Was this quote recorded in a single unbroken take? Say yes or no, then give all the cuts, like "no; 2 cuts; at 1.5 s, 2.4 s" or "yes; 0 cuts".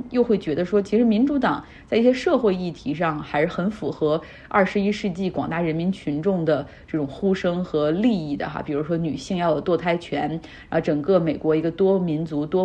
yes; 0 cuts